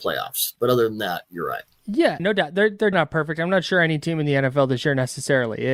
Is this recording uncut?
no; 2 cuts; at 2.2 s, 2.9 s

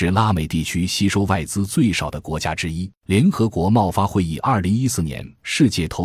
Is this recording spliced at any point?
yes; 1 cut; at 2.9 s

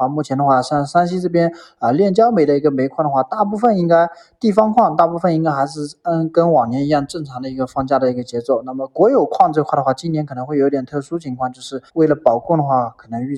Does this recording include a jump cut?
yes; 1 cut; at 11.9 s

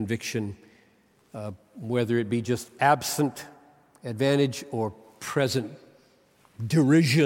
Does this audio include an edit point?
no; 0 cuts

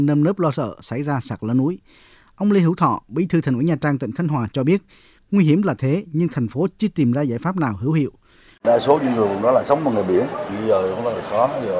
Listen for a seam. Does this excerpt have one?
no; 0 cuts

